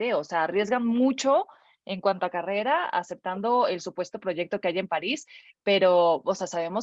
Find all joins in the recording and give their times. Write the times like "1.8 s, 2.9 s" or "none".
none